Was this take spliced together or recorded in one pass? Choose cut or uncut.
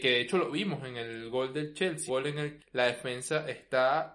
cut